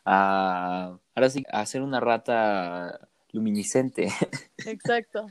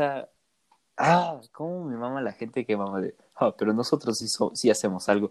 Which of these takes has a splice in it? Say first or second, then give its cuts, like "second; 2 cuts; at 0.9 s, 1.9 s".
first; 1 cut; at 1.4 s